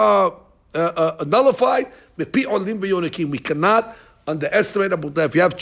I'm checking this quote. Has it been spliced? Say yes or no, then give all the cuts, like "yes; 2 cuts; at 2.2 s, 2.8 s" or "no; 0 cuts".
no; 0 cuts